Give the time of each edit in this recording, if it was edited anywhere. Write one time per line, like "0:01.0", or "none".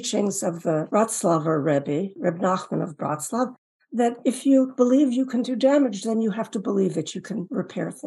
none